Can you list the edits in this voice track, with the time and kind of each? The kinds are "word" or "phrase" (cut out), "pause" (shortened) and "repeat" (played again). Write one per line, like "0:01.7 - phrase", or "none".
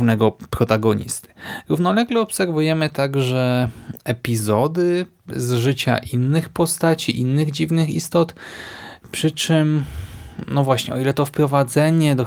none